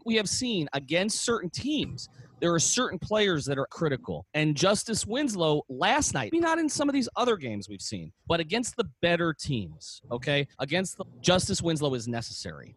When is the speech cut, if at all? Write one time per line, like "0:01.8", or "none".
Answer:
0:03.7
0:04.3
0:06.3
0:08.2
0:10.5
0:11.0